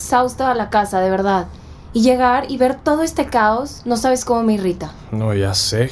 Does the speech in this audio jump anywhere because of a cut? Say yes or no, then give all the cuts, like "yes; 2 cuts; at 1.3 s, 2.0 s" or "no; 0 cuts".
no; 0 cuts